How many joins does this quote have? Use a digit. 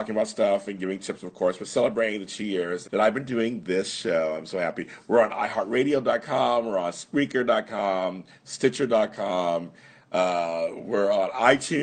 1